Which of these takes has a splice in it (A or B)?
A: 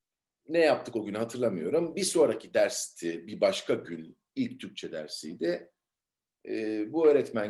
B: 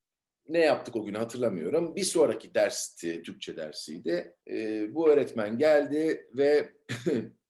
B